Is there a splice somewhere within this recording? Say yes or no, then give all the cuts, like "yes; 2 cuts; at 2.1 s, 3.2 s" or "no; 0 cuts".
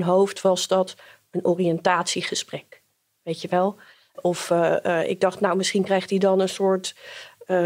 no; 0 cuts